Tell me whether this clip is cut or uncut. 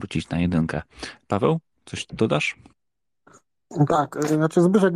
uncut